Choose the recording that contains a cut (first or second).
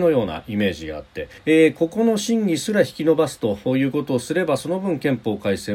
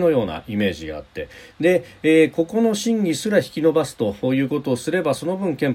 first